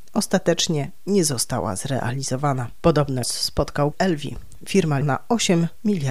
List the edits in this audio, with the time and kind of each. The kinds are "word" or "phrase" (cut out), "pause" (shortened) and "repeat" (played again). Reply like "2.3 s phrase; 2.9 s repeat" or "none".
3.2 s word; 3.9 s word; 5.0 s word